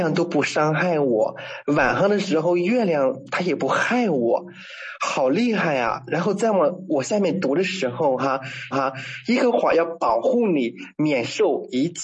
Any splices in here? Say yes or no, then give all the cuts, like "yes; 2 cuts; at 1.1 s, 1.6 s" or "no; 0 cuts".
yes; 1 cut; at 8.7 s